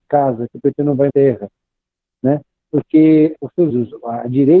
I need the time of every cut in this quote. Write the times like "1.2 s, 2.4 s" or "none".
1.1 s, 3.4 s, 3.7 s